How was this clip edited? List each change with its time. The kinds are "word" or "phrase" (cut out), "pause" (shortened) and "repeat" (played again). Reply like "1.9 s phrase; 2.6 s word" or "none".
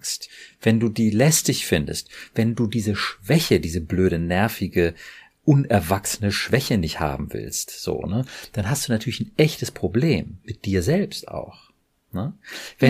none